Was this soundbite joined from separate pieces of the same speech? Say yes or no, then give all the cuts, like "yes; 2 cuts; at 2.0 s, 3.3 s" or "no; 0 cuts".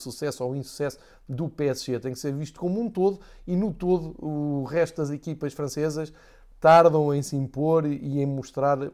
no; 0 cuts